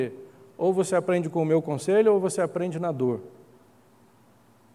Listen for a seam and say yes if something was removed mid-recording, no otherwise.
no